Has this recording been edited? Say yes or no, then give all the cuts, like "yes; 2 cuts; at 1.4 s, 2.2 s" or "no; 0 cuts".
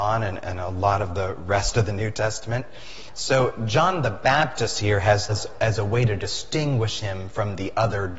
yes; 1 cut; at 5.3 s